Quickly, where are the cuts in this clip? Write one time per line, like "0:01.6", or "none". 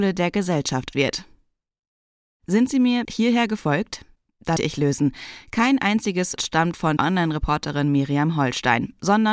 0:00.9
0:03.0
0:04.6
0:06.4
0:07.0